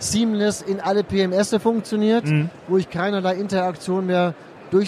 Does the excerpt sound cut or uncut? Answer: uncut